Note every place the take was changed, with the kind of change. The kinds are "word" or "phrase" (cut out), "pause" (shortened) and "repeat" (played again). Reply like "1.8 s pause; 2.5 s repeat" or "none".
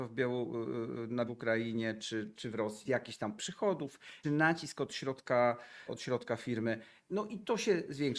1.3 s word; 2.3 s word; 2.9 s word; 3.4 s word; 4.2 s word; 5.9 s word